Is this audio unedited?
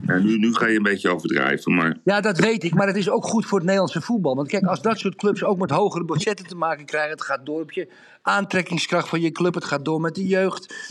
yes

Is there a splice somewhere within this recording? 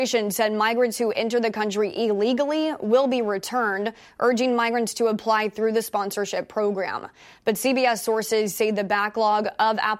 no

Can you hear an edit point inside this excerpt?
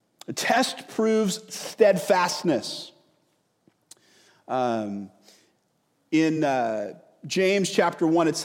no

